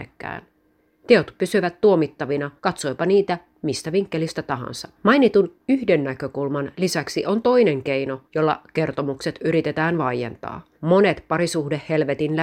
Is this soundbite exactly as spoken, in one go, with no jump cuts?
no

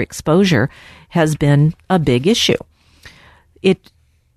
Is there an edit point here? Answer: no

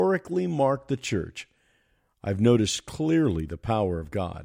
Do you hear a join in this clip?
no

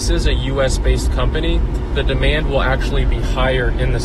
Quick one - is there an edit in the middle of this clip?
yes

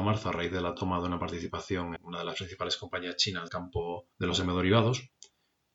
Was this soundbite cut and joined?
yes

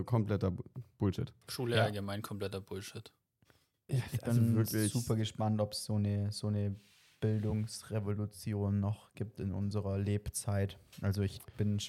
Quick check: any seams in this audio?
yes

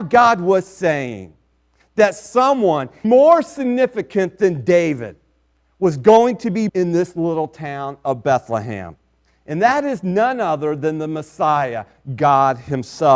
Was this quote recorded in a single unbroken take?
no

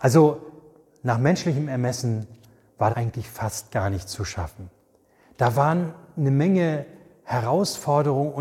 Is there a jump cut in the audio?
yes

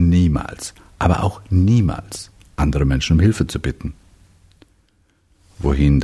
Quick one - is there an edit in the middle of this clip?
no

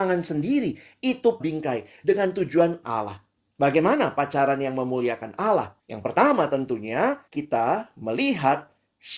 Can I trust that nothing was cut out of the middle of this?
no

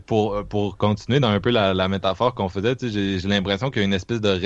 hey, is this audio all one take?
yes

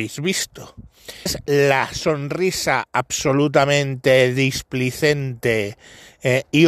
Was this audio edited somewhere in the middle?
yes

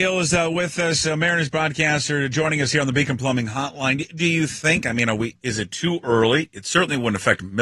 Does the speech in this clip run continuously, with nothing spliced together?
yes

